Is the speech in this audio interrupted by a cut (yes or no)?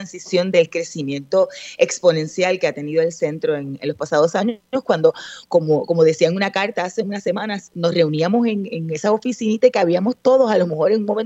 no